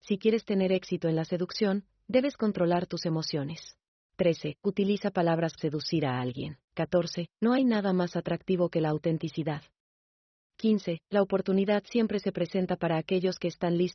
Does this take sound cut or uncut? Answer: cut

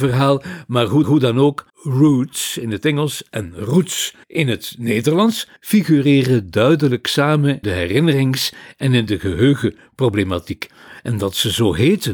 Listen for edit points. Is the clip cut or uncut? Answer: cut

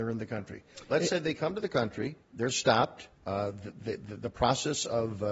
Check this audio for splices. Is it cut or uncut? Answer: cut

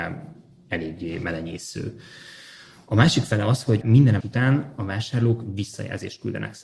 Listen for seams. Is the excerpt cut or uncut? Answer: cut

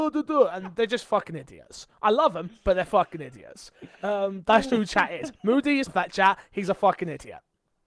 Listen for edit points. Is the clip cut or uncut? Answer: cut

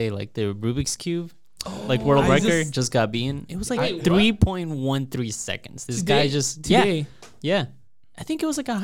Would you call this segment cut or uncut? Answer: uncut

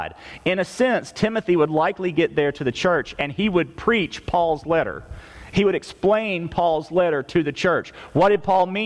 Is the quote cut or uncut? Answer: uncut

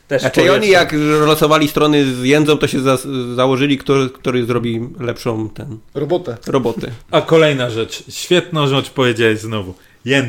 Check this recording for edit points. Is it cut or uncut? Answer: cut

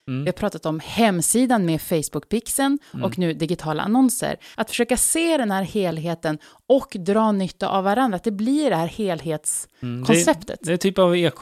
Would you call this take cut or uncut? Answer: uncut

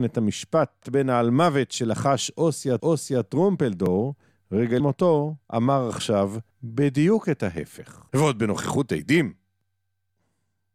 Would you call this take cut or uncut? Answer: cut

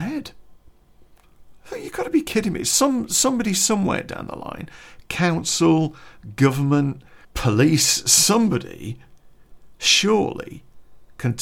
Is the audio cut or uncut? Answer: cut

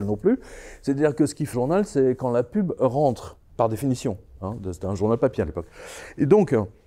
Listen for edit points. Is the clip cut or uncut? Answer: cut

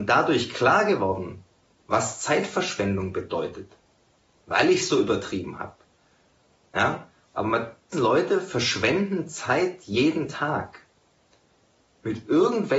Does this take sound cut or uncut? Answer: cut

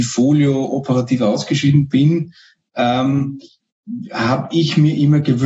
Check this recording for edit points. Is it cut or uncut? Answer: uncut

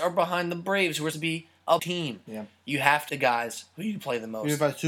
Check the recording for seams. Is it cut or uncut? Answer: cut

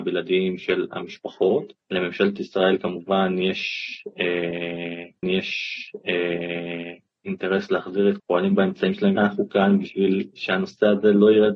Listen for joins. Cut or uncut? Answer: cut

